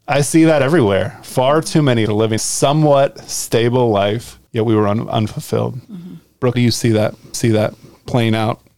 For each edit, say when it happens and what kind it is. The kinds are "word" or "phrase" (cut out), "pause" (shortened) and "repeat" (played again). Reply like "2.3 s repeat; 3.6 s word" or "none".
2.1 s phrase; 2.4 s word; 4.5 s pause; 5.8 s pause; 6.5 s word; 7.3 s repeat